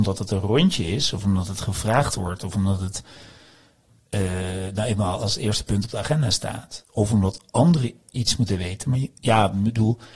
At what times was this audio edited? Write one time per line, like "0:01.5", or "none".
none